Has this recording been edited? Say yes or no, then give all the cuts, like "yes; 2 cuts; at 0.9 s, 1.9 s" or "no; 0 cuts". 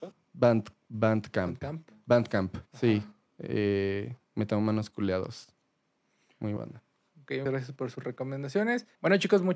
yes; 4 cuts; at 2.7 s, 4.2 s, 6.6 s, 7.5 s